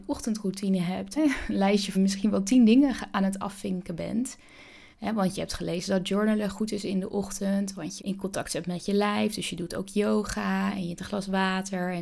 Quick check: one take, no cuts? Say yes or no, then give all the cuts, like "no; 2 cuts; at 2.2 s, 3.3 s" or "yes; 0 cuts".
no; 5 cuts; at 1.2 s, 1.9 s, 4.9 s, 8.0 s, 11.0 s